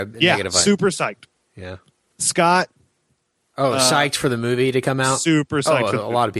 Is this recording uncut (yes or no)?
yes